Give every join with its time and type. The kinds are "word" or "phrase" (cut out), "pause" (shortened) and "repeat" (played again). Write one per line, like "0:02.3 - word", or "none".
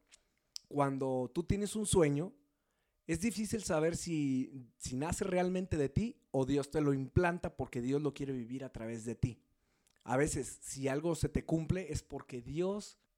none